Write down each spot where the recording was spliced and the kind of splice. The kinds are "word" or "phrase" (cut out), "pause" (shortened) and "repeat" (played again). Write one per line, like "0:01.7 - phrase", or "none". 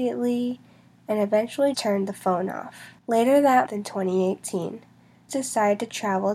0:01.7 - word
0:03.0 - pause
0:03.7 - word
0:05.3 - word